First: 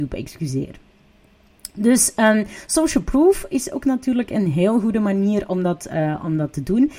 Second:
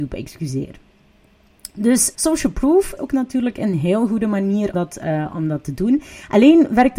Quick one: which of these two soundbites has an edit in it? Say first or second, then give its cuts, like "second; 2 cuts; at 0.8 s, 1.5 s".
second; 3 cuts; at 2.1 s, 3.0 s, 4.7 s